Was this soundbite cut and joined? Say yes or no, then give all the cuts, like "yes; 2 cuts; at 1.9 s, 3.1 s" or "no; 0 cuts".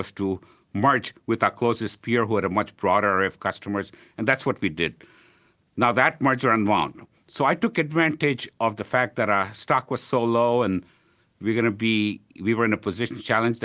no; 0 cuts